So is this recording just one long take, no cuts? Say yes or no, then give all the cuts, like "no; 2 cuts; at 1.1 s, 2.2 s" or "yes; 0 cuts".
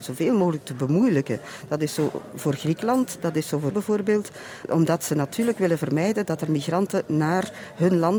no; 1 cut; at 3.7 s